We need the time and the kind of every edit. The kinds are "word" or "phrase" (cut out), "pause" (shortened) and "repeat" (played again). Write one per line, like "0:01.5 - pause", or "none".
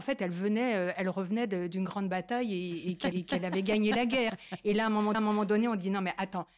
0:03.1 - repeat
0:05.1 - repeat

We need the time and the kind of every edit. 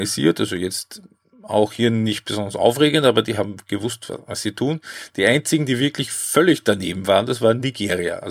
none

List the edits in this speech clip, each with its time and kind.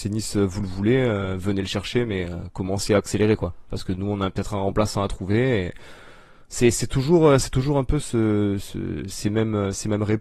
none

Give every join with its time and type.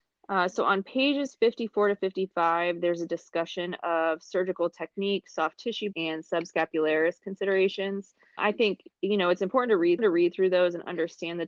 0:05.9 - word
0:08.4 - word
0:10.0 - repeat

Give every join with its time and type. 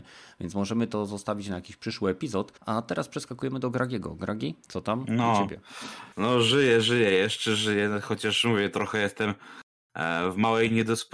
0:02.6 - pause
0:04.6 - pause
0:06.1 - pause

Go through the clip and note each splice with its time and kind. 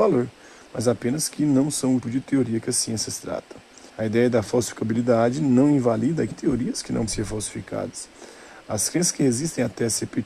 0:02.0 - word
0:03.9 - pause
0:06.3 - phrase
0:07.1 - word

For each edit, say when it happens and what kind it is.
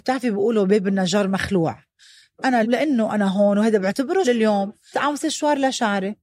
0:02.6 - word
0:04.2 - word
0:04.9 - word

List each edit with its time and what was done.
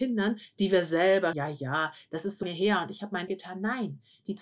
0:01.3 - word
0:02.4 - word
0:03.3 - word

